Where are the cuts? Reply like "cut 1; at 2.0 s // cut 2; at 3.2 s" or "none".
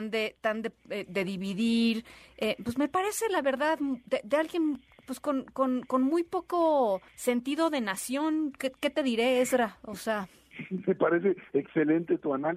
cut 1; at 7.1 s